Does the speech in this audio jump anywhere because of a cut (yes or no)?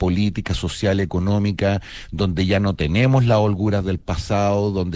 no